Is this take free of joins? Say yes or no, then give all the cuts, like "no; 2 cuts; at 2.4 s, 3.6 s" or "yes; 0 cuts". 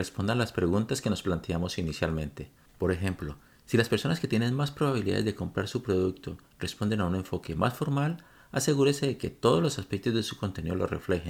yes; 0 cuts